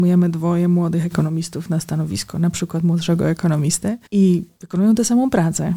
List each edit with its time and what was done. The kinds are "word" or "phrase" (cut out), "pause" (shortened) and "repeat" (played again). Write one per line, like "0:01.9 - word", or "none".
0:04.1 - pause